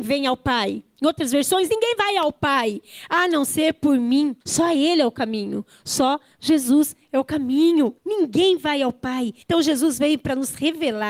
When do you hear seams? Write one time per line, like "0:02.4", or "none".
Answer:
0:04.4
0:08.0
0:09.4